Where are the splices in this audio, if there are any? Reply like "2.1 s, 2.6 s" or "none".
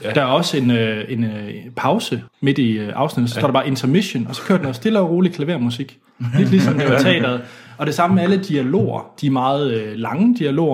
2.3 s